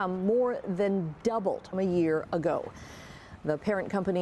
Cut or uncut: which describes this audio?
cut